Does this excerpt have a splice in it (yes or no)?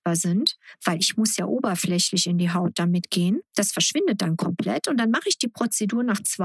no